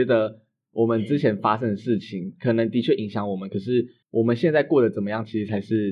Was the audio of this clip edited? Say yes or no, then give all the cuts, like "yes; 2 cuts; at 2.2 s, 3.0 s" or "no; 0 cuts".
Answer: yes; 1 cut; at 4.0 s